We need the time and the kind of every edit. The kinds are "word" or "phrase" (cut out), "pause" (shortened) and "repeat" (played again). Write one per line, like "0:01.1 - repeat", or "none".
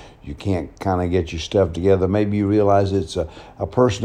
none